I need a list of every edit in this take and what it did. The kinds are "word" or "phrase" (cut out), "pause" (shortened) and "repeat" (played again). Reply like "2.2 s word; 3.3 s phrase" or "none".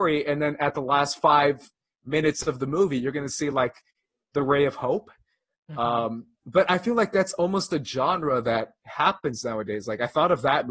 none